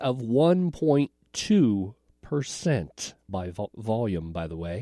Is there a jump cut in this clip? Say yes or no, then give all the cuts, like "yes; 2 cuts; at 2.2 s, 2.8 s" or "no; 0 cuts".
yes; 2 cuts; at 3.3 s, 3.7 s